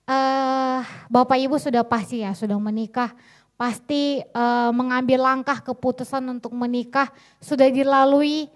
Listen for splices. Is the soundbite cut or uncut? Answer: uncut